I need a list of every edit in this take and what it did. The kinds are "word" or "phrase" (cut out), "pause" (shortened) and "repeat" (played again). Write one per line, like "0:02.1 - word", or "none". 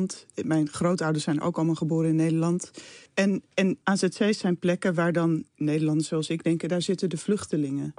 0:03.1 - pause
0:03.8 - pause
0:05.5 - pause